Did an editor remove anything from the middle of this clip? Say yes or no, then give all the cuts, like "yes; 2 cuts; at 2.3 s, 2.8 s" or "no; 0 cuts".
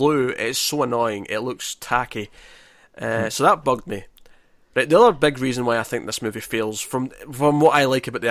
no; 0 cuts